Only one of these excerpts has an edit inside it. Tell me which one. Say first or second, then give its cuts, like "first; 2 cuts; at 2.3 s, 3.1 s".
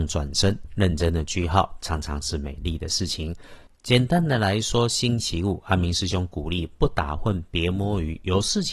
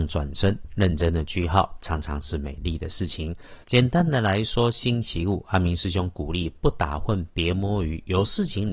second; 1 cut; at 3.6 s